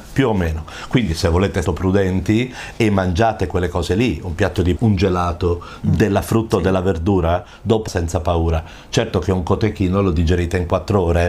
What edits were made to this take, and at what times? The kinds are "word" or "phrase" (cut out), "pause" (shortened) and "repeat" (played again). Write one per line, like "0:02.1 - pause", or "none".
0:01.6 - phrase
0:04.8 - word
0:07.9 - phrase